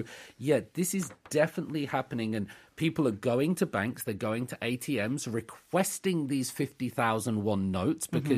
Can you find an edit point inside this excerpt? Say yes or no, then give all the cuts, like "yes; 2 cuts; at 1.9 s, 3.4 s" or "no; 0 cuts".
no; 0 cuts